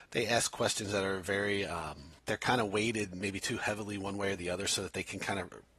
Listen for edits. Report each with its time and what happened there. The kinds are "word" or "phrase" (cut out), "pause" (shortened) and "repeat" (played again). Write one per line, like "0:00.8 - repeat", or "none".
0:02.2 - pause